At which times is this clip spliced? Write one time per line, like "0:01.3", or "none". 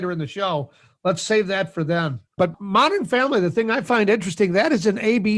0:02.3